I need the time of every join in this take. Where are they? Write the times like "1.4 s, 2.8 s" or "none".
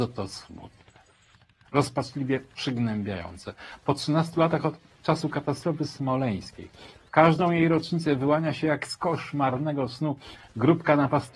none